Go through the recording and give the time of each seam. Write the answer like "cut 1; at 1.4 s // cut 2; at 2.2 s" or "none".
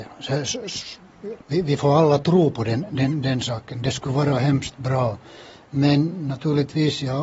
cut 1; at 1.4 s